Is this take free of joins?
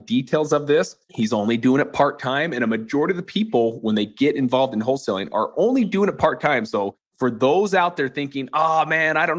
no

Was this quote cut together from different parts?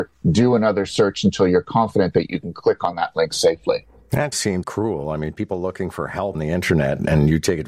yes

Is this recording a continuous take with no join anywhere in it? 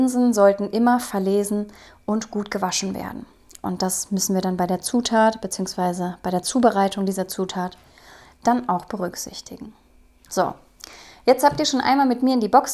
yes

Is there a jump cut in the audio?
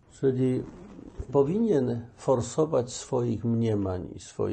yes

